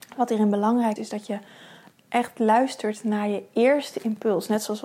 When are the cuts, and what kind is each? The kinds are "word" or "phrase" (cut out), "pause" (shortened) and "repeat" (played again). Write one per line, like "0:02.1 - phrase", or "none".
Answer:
0:01.0 - word
0:01.9 - word